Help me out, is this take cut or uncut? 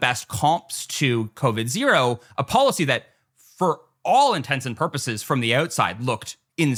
uncut